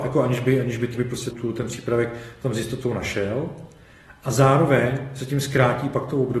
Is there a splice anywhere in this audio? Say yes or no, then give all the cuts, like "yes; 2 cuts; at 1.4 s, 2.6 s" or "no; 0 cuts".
yes; 2 cuts; at 0.9 s, 1.3 s